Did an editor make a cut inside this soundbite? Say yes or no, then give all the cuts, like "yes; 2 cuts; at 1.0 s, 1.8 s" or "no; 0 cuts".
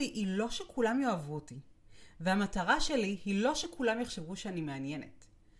no; 0 cuts